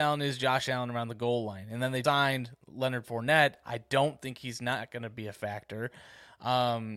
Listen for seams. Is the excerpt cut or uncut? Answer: cut